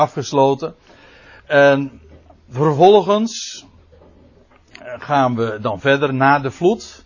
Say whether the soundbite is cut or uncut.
uncut